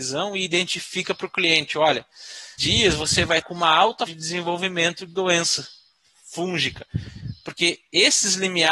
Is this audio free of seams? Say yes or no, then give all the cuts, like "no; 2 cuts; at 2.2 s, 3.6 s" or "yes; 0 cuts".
no; 4 cuts; at 2.6 s, 3.4 s, 4.1 s, 5.1 s